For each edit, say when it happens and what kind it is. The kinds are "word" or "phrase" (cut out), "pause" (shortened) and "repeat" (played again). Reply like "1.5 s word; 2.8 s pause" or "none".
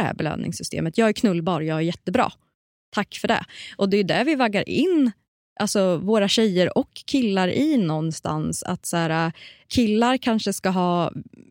none